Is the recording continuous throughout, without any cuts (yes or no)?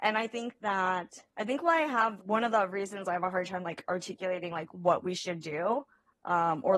no